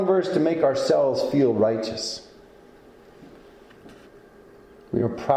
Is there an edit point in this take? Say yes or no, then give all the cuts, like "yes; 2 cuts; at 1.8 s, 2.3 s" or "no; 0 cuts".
no; 0 cuts